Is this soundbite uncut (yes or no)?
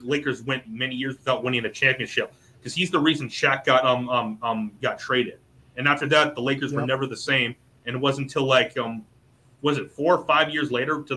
yes